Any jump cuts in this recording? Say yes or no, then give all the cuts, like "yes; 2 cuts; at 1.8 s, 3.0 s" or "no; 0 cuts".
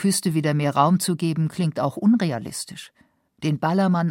no; 0 cuts